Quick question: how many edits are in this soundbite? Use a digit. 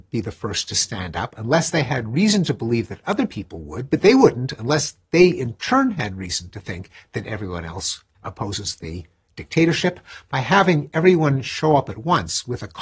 0